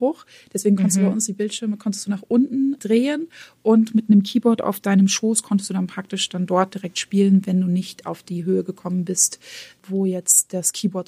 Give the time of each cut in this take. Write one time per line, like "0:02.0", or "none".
none